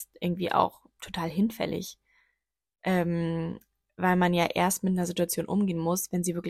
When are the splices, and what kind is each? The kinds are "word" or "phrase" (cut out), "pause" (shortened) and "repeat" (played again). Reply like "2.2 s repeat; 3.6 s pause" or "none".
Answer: none